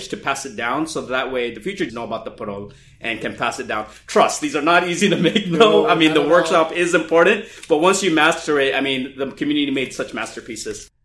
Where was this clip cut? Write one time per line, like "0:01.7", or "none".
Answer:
0:01.9